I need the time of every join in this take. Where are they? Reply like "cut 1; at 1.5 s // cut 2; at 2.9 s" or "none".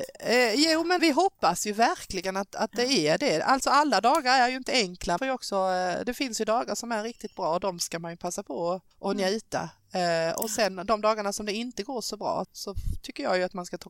cut 1; at 1.0 s // cut 2; at 5.2 s // cut 3; at 8.9 s // cut 4; at 12.4 s